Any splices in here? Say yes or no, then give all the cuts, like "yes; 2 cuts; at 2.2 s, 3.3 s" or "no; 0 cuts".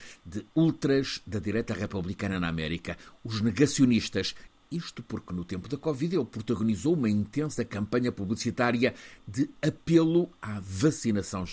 no; 0 cuts